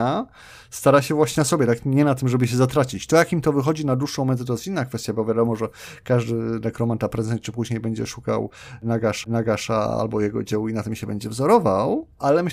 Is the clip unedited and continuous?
no; 2 cuts; at 1.3 s, 9.2 s

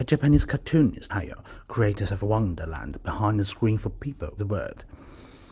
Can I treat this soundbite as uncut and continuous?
no; 3 cuts; at 1.1 s, 2.1 s, 4.4 s

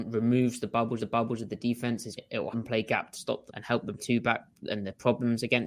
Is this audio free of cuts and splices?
no; 6 cuts; at 1.0 s, 2.2 s, 2.5 s, 3.1 s, 3.5 s, 4.0 s

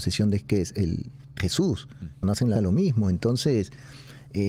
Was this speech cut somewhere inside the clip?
yes; 3 cuts; at 1.4 s, 2.2 s, 2.5 s

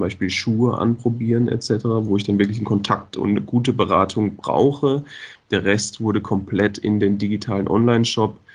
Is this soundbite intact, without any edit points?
yes; 0 cuts

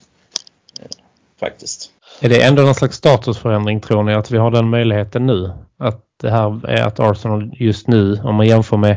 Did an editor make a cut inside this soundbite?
no; 0 cuts

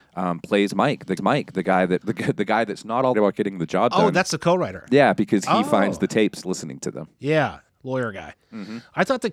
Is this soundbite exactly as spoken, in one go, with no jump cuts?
no; 5 cuts; at 1.2 s, 2.0 s, 3.1 s, 6.4 s, 7.7 s

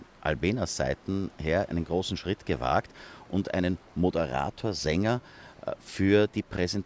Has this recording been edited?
yes; 1 cut; at 1.7 s

